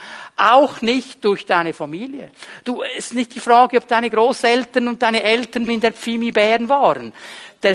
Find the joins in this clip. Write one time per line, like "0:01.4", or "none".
0:05.7